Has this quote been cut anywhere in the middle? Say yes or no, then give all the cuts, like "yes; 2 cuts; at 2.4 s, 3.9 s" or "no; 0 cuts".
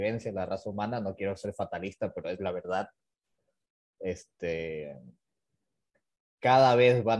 no; 0 cuts